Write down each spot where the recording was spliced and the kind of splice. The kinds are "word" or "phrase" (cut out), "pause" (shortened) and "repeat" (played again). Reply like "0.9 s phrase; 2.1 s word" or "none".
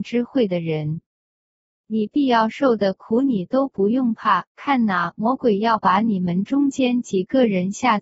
none